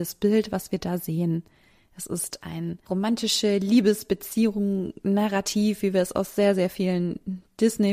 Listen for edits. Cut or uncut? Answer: uncut